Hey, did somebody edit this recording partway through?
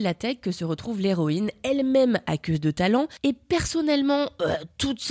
no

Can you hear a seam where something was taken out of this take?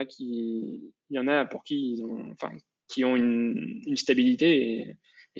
no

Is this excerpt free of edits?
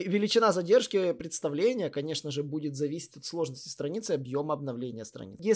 yes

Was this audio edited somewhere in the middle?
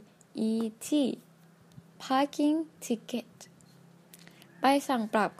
no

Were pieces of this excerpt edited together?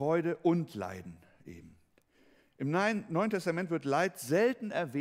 no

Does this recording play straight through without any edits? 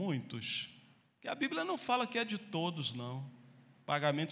yes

